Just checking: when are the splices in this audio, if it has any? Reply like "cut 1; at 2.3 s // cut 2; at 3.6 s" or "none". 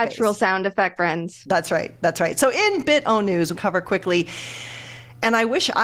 cut 1; at 1.0 s // cut 2; at 3.5 s